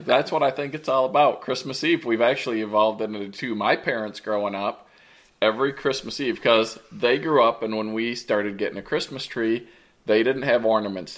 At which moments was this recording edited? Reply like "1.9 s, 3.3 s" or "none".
none

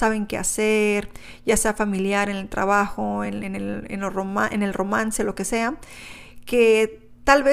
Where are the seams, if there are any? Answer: none

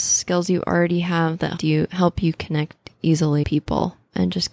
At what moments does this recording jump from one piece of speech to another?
1.6 s, 3.4 s

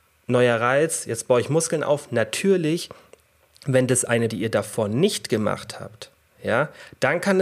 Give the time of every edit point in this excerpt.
4.3 s

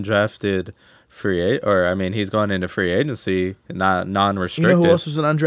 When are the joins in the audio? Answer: none

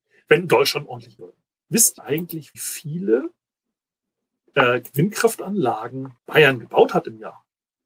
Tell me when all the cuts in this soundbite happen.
1.2 s, 2.0 s, 2.5 s, 6.2 s

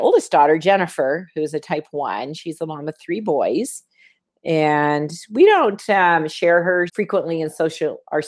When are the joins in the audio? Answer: 6.9 s

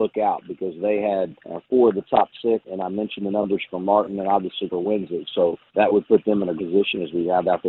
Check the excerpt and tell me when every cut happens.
1.4 s, 2.6 s, 4.7 s, 5.7 s, 6.6 s

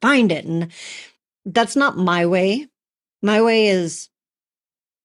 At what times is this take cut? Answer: none

